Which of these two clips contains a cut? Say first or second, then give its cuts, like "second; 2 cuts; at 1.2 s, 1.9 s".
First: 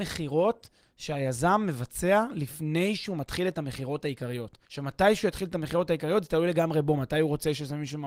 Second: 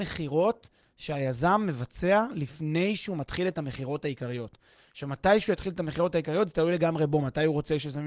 first; 1 cut; at 4.6 s